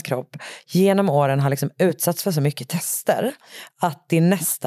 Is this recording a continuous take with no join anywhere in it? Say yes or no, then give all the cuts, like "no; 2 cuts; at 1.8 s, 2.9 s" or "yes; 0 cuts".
yes; 0 cuts